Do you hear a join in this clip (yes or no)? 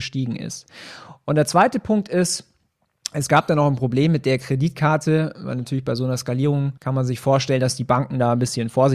yes